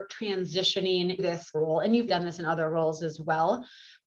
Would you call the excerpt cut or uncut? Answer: cut